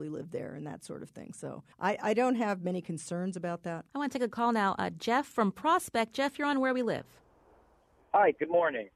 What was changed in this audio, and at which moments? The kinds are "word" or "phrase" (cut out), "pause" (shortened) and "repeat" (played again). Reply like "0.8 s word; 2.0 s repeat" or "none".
1.7 s pause; 3.9 s pause